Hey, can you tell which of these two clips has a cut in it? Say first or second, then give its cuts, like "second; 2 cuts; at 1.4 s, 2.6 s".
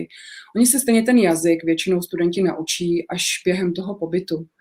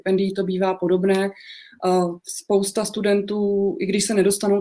second; 1 cut; at 2.2 s